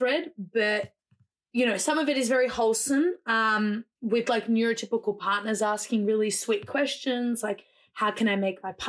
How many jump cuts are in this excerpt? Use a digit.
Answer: 0